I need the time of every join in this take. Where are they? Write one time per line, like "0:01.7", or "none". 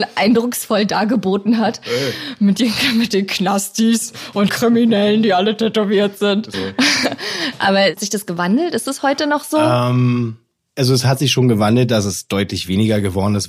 0:04.5
0:06.5
0:08.0